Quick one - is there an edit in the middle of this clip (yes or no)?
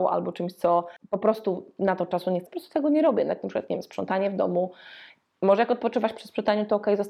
yes